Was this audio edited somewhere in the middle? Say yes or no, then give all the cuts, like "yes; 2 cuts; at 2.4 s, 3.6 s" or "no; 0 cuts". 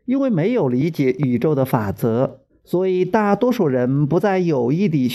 yes; 1 cut; at 2.5 s